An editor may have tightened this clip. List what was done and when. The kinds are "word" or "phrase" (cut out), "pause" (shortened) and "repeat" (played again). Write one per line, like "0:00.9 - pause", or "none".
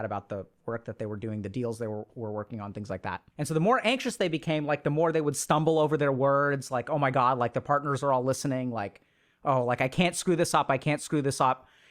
none